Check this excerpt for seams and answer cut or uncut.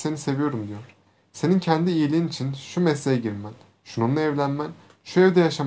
uncut